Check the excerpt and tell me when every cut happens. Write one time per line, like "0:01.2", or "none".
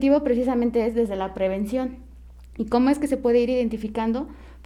none

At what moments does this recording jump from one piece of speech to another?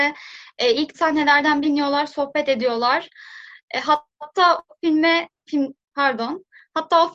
0:00.9
0:01.6
0:04.1

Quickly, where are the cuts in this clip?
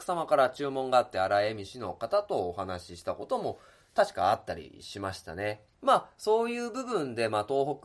0:05.7

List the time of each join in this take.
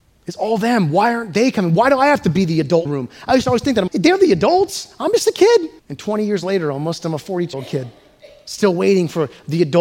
0:02.8
0:03.9
0:05.8
0:07.5

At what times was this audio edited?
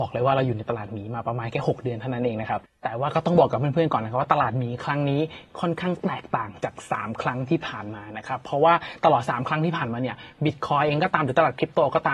none

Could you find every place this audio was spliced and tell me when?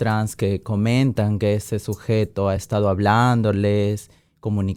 none

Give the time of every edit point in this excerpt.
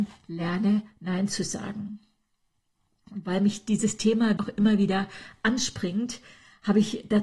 0:04.4

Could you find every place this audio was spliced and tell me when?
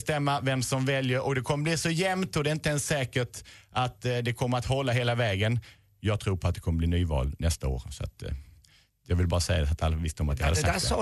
none

